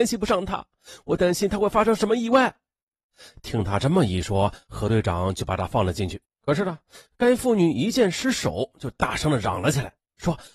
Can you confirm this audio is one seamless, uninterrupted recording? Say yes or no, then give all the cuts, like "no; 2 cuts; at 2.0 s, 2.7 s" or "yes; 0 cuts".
no; 1 cut; at 6.3 s